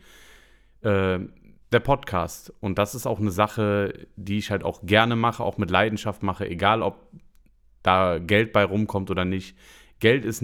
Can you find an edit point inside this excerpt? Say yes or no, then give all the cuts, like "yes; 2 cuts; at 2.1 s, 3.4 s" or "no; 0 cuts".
no; 0 cuts